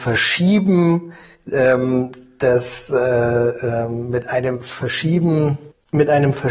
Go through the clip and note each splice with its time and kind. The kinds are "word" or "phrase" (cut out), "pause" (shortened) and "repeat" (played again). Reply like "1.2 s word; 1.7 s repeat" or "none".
none